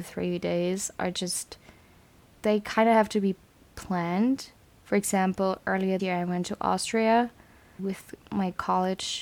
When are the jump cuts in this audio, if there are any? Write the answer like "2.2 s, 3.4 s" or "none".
6.0 s